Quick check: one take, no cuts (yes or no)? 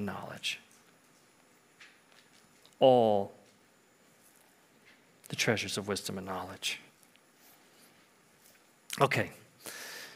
yes